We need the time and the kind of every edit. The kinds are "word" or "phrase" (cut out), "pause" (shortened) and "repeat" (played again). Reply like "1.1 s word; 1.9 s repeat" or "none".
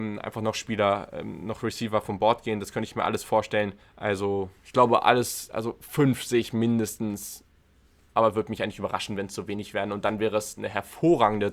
3.8 s pause